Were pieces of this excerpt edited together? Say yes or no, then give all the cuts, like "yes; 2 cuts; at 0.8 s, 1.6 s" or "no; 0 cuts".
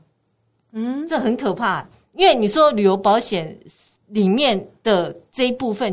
no; 0 cuts